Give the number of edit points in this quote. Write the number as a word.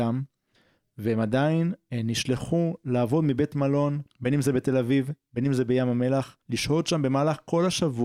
two